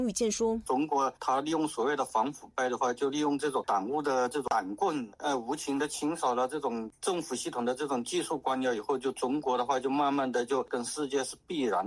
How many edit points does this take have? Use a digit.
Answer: 1